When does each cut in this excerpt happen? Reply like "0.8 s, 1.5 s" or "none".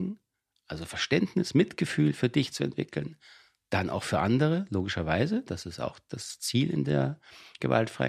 none